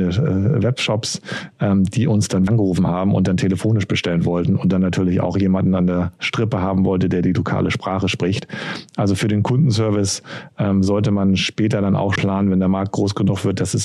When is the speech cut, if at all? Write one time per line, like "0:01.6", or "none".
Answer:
0:02.5
0:12.2